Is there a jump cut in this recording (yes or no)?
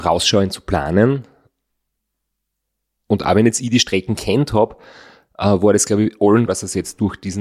yes